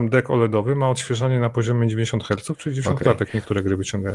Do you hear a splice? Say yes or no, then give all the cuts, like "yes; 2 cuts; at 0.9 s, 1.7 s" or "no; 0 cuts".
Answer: no; 0 cuts